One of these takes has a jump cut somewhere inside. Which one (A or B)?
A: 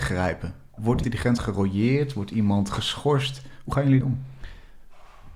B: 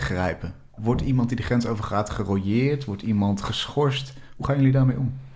A